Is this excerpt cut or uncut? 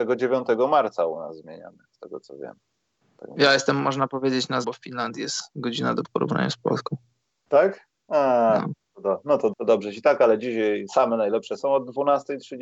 cut